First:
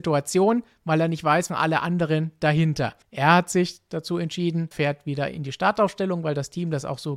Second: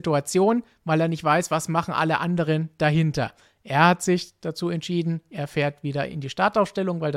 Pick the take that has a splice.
first; 3 cuts; at 1.5 s, 3.0 s, 4.7 s

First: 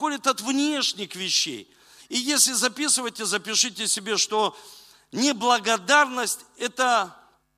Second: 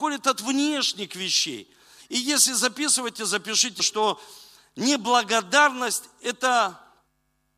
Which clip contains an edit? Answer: second; 1 cut; at 3.8 s

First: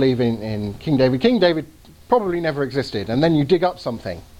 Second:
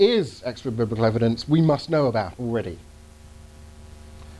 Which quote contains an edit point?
second; 1 cut; at 2.3 s

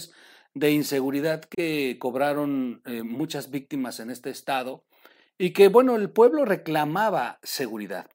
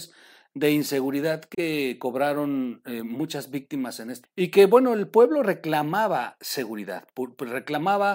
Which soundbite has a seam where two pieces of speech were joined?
second; 1 cut; at 4.2 s

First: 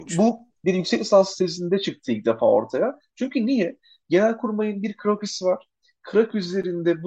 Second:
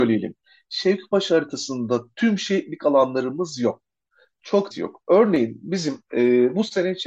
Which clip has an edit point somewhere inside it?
second; 1 cut; at 4.7 s

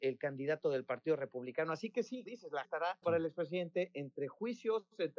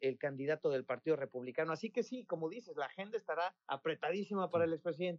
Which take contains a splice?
first; 3 cuts; at 2.3 s, 2.6 s, 3.0 s

